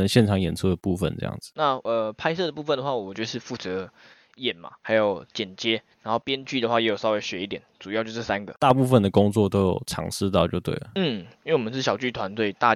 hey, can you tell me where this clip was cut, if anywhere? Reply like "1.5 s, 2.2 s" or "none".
5.9 s, 11.3 s